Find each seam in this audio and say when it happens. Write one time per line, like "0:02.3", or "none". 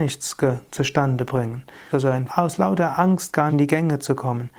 0:01.9
0:02.3
0:03.5